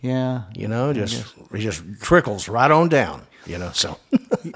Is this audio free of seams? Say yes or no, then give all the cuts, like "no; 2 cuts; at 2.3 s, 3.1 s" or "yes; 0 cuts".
yes; 0 cuts